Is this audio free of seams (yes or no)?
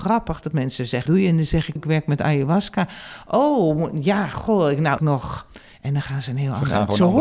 no